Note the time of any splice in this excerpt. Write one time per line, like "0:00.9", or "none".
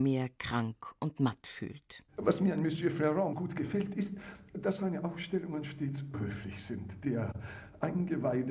0:02.1
0:03.3
0:06.1